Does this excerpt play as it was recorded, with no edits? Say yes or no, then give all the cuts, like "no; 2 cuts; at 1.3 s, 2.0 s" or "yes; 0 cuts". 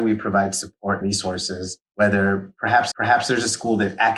no; 3 cuts; at 1.0 s, 1.9 s, 2.9 s